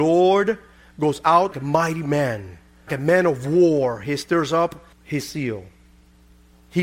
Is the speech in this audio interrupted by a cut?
yes; 3 cuts; at 1.5 s, 2.9 s, 4.9 s

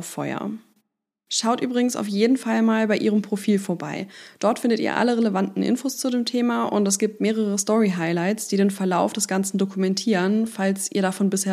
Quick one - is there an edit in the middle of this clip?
no; 0 cuts

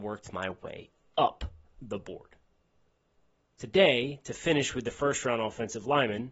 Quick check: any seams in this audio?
no; 0 cuts

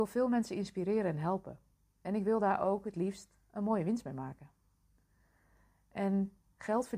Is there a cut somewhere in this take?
no; 0 cuts

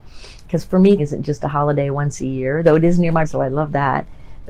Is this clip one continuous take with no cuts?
no; 2 cuts; at 1.0 s, 3.2 s

